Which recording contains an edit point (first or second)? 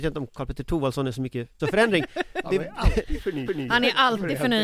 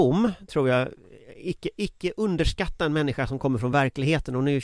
first